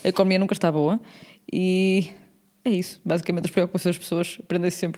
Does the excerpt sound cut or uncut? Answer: uncut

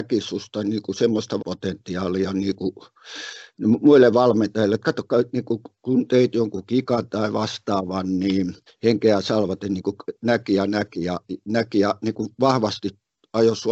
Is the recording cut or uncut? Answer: cut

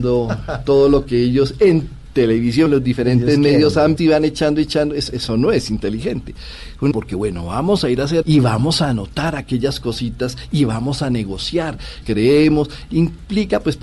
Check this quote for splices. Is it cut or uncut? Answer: cut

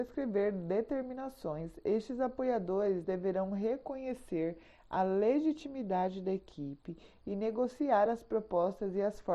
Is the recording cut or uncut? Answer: uncut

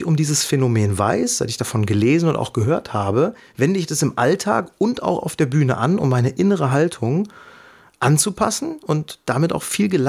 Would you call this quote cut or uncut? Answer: cut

